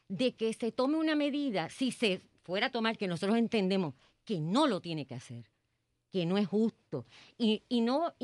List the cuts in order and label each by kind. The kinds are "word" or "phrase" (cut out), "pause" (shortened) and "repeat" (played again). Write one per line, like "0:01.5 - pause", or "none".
none